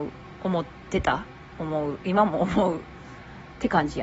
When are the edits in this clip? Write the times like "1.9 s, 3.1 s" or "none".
none